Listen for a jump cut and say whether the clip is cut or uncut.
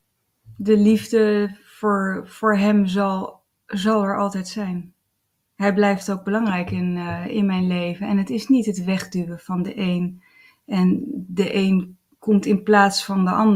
uncut